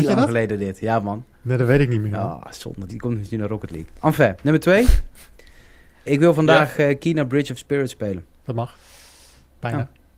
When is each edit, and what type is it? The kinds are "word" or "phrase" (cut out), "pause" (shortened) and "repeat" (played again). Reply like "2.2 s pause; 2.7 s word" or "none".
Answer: 2.9 s phrase; 6.1 s word; 8.3 s pause